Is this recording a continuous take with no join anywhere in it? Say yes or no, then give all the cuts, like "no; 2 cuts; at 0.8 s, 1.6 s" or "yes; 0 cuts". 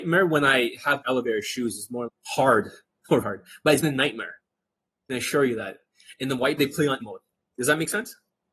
no; 7 cuts; at 1.0 s, 2.1 s, 3.2 s, 3.8 s, 5.1 s, 6.6 s, 7.0 s